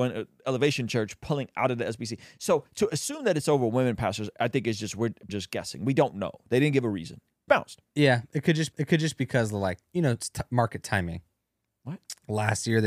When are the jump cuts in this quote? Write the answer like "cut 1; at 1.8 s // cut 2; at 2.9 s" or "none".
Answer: cut 1; at 5.3 s // cut 2; at 7.5 s // cut 3; at 8.7 s // cut 4; at 11.7 s